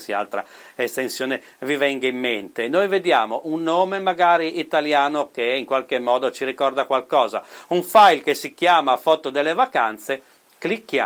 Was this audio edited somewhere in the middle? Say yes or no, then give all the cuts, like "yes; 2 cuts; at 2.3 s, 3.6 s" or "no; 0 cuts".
no; 0 cuts